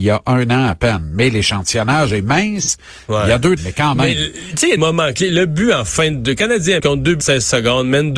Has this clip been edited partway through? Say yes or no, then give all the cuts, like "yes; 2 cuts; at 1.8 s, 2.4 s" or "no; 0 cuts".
yes; 4 cuts; at 3.6 s, 4.8 s, 6.8 s, 7.2 s